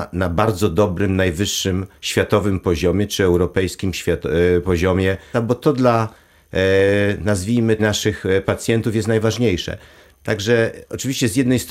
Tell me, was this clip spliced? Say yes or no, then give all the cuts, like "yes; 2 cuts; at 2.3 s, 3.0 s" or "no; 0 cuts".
yes; 3 cuts; at 2.0 s, 5.3 s, 7.8 s